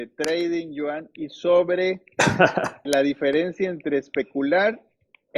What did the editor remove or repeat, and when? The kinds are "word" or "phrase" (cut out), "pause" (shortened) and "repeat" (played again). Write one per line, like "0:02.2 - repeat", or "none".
0:02.8 - word

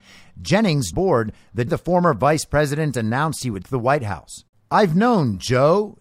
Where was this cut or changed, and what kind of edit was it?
0:00.9 - phrase
0:01.7 - word
0:03.6 - word
0:04.5 - pause

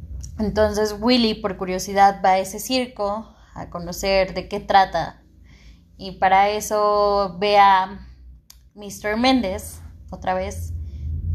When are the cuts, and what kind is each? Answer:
none

